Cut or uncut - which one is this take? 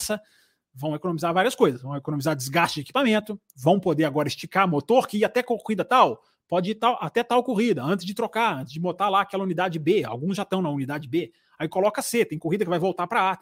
uncut